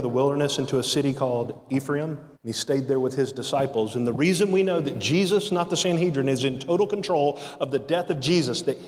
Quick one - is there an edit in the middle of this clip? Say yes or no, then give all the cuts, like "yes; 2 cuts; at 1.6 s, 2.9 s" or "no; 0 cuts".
yes; 1 cut; at 2.4 s